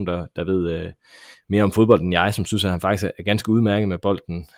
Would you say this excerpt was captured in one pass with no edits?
no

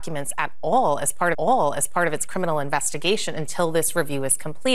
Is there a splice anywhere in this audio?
yes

